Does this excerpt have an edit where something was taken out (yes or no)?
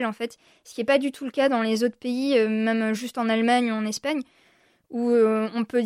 no